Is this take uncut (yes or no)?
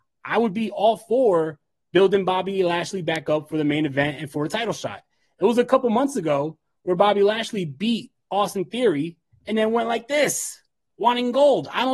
yes